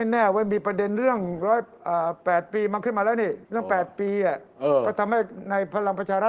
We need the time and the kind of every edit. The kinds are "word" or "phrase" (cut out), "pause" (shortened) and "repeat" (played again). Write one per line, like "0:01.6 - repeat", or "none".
0:03.4 - pause